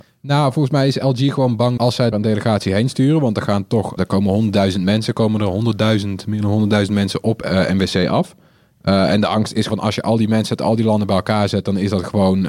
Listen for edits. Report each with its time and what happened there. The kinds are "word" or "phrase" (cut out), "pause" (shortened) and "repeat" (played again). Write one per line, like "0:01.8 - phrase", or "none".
0:01.8 - word
0:02.1 - word
0:04.0 - word
0:09.7 - word